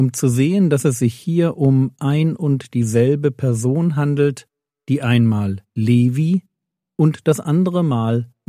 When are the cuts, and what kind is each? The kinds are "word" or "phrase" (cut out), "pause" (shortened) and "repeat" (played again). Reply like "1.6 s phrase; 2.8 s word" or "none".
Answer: none